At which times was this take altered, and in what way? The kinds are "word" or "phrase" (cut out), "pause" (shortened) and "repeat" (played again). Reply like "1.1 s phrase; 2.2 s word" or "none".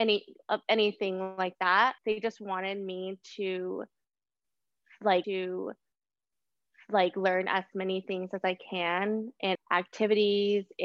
2.0 s pause; 5.2 s repeat; 9.5 s phrase